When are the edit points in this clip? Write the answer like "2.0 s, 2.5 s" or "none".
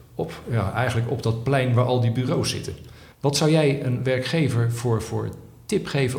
3.1 s

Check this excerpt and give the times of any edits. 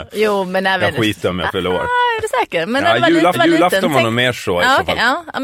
3.3 s

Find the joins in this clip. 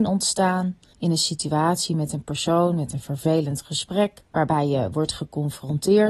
4.3 s

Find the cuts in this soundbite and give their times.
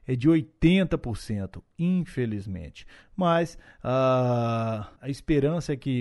5.0 s

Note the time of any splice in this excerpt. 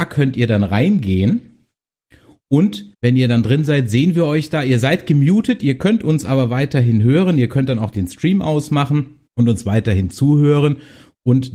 2.9 s, 9.3 s

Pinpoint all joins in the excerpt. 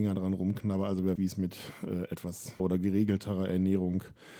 1.2 s, 2.6 s

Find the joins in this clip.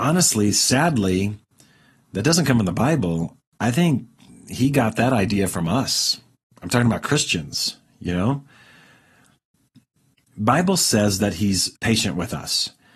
11.8 s

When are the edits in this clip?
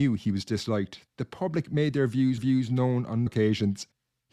1.1 s, 2.4 s, 3.3 s

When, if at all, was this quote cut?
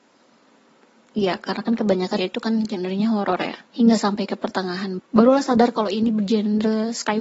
2.2 s, 3.7 s, 5.0 s

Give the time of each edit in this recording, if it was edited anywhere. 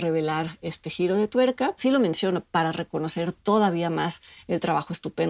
1.8 s

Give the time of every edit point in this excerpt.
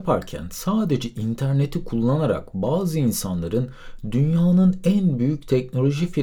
none

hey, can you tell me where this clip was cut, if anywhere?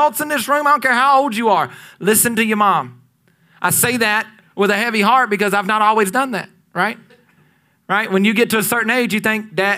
none

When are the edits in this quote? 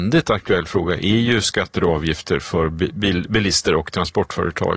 none

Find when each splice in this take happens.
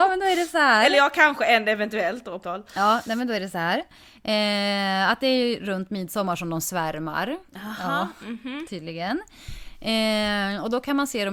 2.4 s, 7.5 s

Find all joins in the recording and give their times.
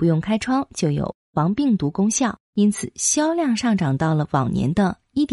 2.4 s

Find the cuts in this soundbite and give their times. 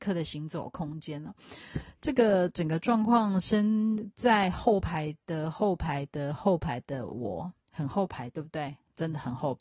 7.6 s

